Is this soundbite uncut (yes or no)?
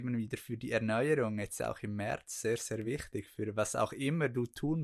yes